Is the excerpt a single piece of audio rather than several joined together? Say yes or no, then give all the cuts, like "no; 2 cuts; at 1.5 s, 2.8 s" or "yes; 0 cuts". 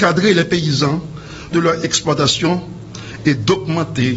no; 1 cut; at 1.5 s